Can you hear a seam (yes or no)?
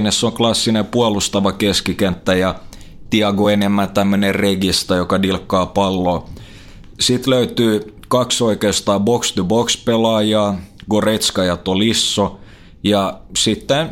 no